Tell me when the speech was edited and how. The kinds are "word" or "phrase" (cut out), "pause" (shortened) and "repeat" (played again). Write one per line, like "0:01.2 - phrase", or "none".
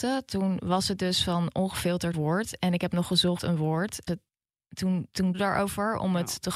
0:02.1 - phrase
0:03.4 - phrase
0:04.1 - phrase
0:05.3 - word